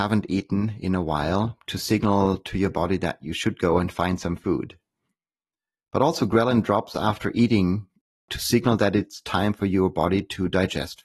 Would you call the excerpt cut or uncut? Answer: uncut